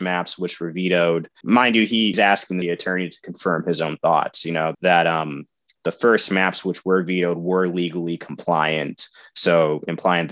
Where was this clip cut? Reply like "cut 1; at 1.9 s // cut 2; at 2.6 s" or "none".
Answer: cut 1; at 1.4 s // cut 2; at 2.1 s // cut 3; at 2.6 s // cut 4; at 4.7 s